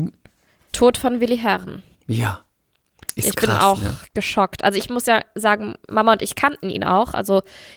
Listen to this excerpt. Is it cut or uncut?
cut